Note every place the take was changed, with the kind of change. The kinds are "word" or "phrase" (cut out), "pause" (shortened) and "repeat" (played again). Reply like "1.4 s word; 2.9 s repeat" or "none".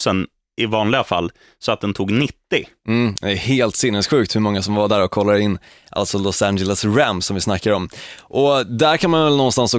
none